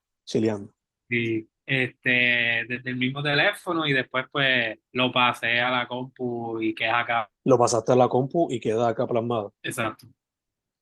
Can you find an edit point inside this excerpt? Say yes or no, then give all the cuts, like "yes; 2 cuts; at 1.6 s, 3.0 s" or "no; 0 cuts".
yes; 4 cuts; at 1.6 s, 4.9 s, 7.4 s, 9.6 s